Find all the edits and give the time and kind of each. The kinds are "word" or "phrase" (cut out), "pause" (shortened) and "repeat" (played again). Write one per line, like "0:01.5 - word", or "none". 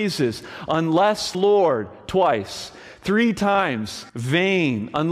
0:01.3 - word
0:04.1 - pause